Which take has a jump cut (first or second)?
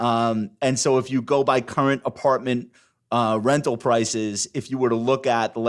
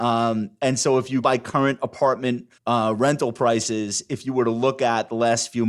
second